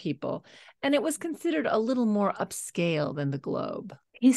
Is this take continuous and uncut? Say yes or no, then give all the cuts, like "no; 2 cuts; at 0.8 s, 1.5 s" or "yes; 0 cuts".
yes; 0 cuts